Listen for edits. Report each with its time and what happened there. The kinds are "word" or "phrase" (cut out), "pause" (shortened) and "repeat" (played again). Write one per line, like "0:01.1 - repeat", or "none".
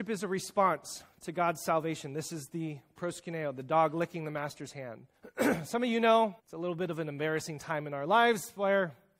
0:05.2 - pause
0:06.4 - pause